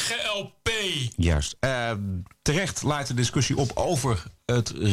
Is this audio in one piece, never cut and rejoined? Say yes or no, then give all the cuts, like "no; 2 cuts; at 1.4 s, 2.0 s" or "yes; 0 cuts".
yes; 0 cuts